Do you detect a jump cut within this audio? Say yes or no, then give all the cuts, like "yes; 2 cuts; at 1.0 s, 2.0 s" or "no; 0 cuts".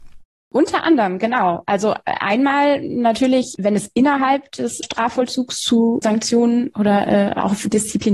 yes; 1 cut; at 4.8 s